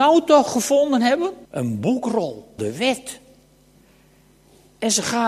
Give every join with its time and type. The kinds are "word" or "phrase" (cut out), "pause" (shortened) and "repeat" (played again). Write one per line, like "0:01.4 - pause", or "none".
0:01.4 - pause
0:02.6 - word